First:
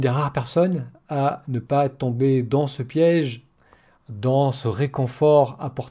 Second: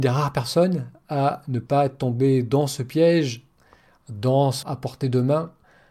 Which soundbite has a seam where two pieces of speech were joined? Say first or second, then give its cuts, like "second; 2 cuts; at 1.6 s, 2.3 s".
second; 1 cut; at 4.6 s